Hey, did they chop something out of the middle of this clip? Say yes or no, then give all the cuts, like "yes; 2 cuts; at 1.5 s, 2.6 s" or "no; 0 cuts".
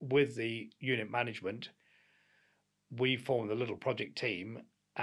no; 0 cuts